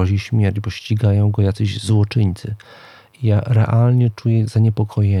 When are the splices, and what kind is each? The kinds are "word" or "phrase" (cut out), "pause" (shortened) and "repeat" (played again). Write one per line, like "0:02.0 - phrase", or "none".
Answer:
none